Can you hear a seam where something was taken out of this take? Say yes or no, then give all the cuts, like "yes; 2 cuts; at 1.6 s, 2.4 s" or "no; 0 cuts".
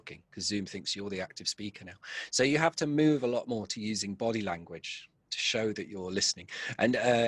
no; 0 cuts